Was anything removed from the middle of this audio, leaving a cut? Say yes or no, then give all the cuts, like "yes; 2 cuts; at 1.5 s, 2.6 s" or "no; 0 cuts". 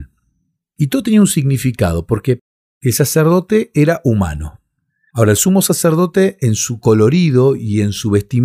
no; 0 cuts